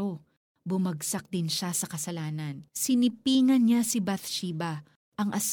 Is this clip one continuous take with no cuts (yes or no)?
no